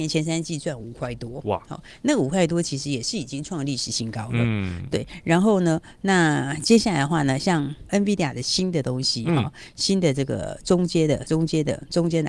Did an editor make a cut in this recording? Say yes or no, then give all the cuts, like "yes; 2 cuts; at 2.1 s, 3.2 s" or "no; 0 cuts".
no; 0 cuts